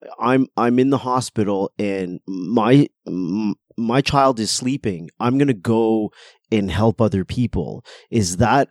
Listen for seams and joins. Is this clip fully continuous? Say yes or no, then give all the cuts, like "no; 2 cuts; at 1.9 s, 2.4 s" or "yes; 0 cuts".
yes; 0 cuts